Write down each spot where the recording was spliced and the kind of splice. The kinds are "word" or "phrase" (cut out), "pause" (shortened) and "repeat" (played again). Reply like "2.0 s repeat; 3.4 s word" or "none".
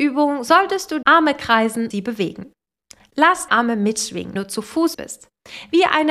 1.0 s word; 1.9 s word; 3.5 s word; 4.4 s word; 4.9 s word